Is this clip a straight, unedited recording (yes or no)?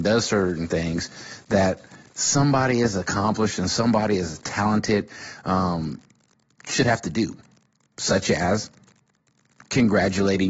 yes